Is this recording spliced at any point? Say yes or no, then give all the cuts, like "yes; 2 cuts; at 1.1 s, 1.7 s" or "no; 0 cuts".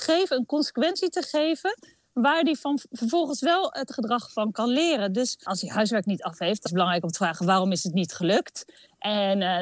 yes; 2 cuts; at 3.9 s, 6.7 s